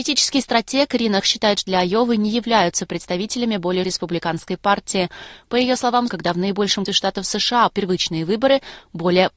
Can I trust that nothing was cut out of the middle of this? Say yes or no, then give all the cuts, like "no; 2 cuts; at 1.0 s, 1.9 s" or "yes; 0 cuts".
no; 6 cuts; at 1.2 s, 1.7 s, 3.8 s, 6.1 s, 6.9 s, 7.7 s